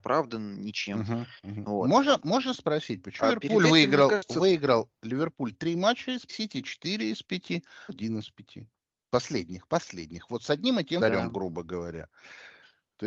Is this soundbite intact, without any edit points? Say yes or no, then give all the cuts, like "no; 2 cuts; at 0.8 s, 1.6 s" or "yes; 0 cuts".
no; 4 cuts; at 3.2 s, 6.3 s, 7.9 s, 11.0 s